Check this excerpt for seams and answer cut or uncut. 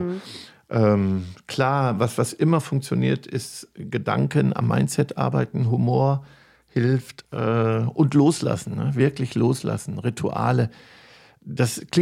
uncut